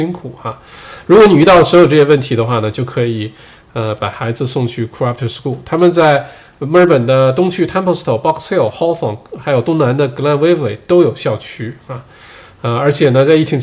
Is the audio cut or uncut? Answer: uncut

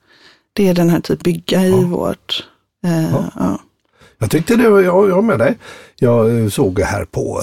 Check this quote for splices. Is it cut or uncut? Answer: cut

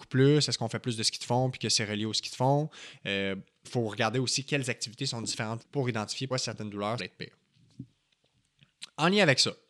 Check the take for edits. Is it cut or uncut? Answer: cut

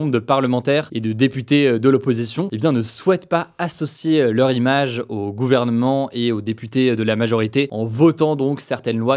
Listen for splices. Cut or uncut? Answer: uncut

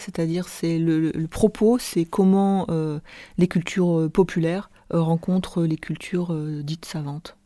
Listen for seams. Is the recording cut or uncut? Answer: cut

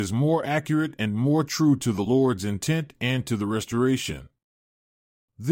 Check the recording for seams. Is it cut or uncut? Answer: uncut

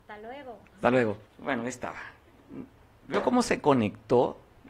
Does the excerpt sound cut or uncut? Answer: cut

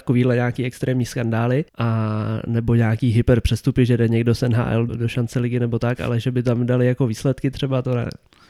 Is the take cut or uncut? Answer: cut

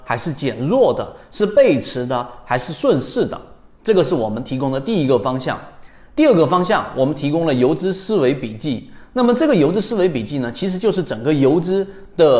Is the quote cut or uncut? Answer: uncut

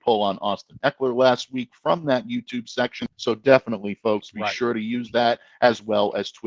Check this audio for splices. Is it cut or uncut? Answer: cut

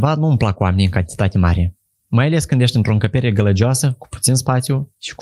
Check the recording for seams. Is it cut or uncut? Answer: uncut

